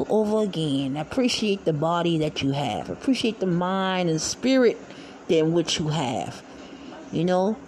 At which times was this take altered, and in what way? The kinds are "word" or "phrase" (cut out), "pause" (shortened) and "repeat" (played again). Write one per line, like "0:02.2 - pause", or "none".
none